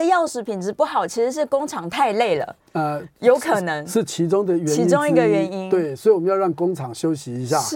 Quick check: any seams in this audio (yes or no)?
no